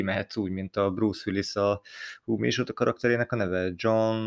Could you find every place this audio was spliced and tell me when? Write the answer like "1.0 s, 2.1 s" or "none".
none